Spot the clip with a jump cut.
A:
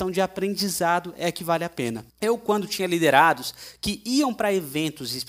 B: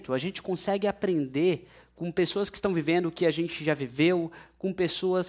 A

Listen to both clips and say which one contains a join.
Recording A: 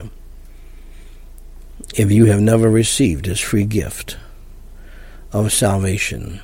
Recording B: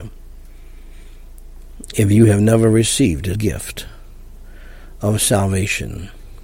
B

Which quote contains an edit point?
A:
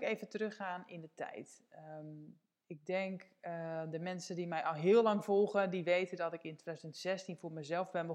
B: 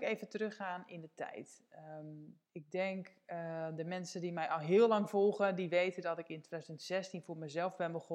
B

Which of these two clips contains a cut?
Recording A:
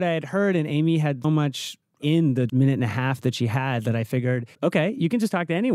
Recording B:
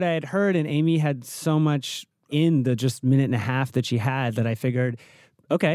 A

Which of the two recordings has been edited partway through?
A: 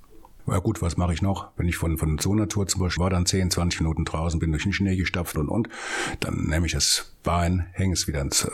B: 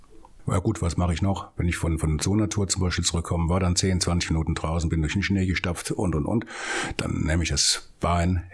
A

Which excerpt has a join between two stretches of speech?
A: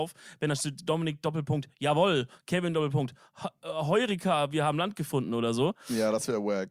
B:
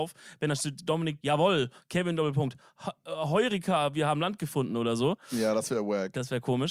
B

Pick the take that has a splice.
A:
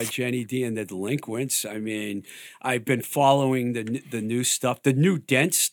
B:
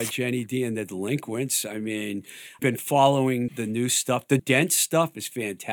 B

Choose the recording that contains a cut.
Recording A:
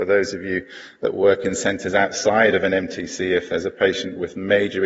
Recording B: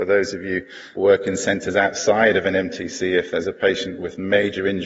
B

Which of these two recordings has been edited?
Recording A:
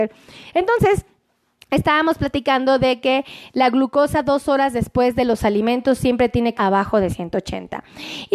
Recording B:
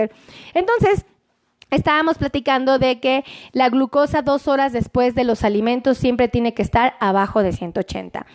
A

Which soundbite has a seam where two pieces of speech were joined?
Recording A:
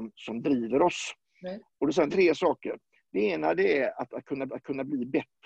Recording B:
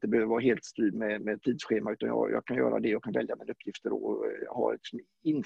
A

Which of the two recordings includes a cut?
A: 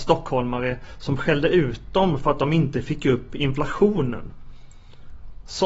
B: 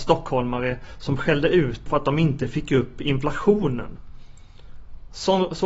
B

